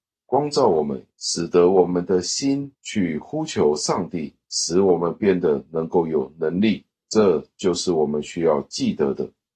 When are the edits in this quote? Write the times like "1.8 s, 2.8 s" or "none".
1.1 s, 2.7 s